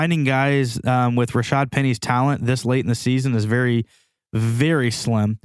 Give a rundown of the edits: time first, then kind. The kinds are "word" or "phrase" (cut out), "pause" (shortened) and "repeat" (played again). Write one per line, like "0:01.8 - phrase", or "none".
none